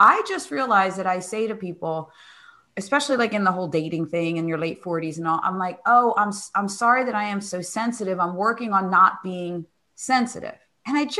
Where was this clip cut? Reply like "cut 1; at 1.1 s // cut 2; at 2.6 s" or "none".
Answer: none